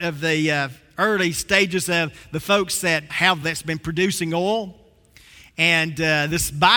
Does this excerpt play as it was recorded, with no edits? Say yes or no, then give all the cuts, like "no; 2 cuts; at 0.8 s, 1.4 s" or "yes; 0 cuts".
no; 2 cuts; at 3.1 s, 3.4 s